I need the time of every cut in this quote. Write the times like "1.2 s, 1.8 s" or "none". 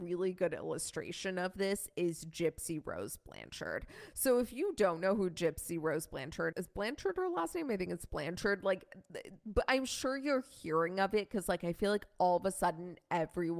6.5 s